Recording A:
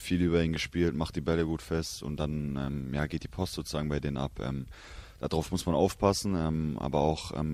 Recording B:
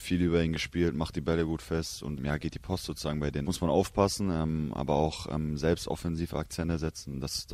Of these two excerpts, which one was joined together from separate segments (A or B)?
B